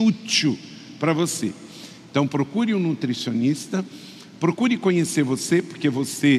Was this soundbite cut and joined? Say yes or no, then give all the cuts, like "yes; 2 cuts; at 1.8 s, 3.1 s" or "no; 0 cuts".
no; 0 cuts